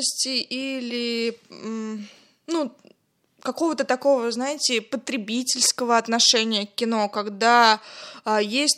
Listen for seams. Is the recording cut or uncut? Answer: uncut